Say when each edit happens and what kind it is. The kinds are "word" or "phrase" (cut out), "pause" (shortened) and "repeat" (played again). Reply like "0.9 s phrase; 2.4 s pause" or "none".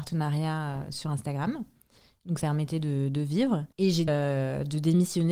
2.4 s phrase; 3.7 s pause; 4.1 s word